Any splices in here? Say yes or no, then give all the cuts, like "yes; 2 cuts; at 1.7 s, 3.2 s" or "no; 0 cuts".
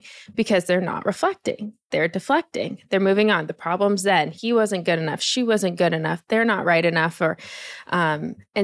no; 0 cuts